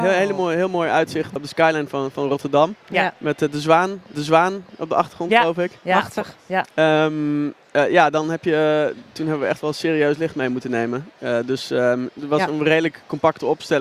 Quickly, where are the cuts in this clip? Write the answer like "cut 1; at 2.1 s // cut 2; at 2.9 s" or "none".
cut 1; at 1.4 s // cut 2; at 4.1 s

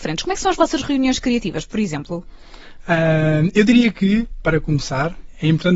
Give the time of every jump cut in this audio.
none

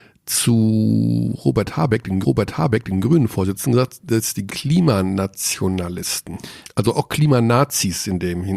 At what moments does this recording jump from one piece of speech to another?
cut 1; at 2.2 s // cut 2; at 4.5 s // cut 3; at 6.6 s

